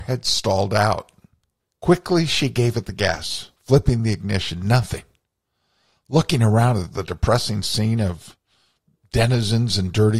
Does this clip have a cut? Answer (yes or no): yes